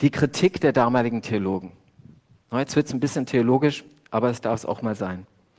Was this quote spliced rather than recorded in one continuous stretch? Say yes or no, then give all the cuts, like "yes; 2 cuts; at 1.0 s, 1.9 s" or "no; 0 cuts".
no; 0 cuts